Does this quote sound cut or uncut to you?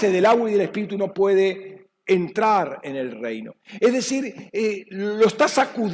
uncut